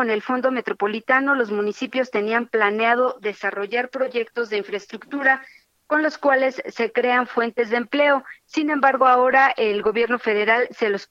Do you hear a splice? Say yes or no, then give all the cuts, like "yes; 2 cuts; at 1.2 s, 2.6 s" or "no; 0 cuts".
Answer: no; 0 cuts